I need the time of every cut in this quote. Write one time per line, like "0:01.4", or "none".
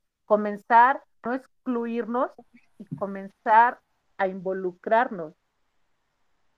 0:01.3

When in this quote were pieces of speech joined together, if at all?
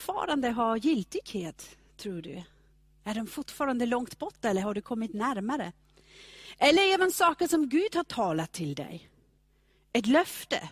none

